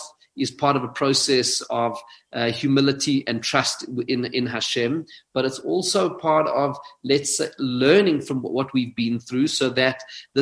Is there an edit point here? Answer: no; 0 cuts

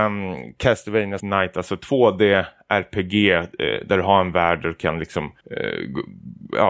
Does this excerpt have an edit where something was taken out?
yes; 2 cuts; at 1.2 s, 5.4 s

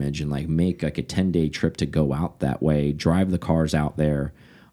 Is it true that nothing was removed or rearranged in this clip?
yes; 0 cuts

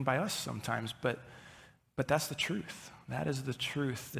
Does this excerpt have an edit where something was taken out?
no; 0 cuts

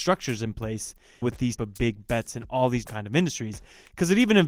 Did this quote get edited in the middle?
yes; 3 cuts; at 1.2 s, 1.6 s, 2.8 s

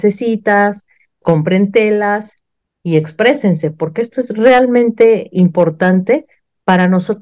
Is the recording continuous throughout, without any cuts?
yes; 0 cuts

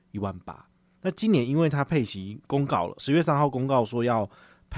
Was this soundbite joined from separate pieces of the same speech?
yes; 1 cut; at 3.0 s

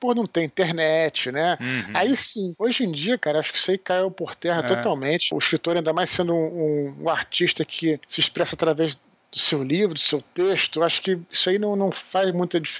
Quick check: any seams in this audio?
no; 0 cuts

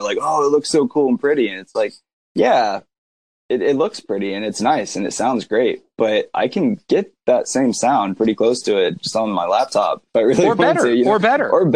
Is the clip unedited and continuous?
yes; 0 cuts

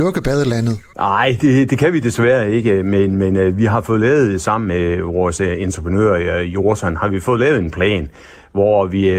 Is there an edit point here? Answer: no; 0 cuts

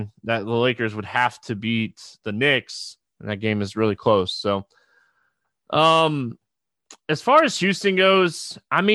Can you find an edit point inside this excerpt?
no; 0 cuts

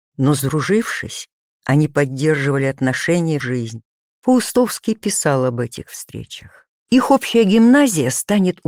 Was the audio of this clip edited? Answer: yes; 2 cuts; at 3.4 s, 6.8 s

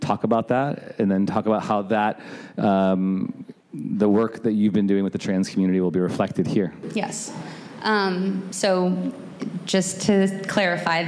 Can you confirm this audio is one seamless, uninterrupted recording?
yes; 0 cuts

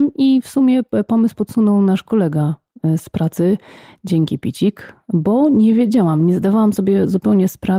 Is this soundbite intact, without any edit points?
yes; 0 cuts

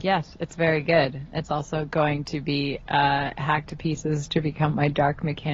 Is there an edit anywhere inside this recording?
no; 0 cuts

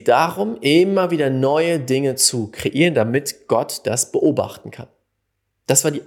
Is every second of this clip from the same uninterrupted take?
yes; 0 cuts

